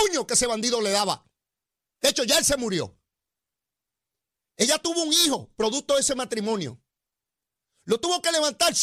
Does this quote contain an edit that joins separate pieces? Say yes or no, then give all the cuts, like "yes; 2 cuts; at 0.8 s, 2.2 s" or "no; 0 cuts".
no; 0 cuts